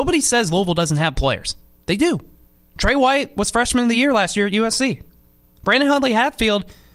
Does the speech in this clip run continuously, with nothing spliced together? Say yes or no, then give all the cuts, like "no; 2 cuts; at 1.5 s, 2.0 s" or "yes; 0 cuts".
yes; 0 cuts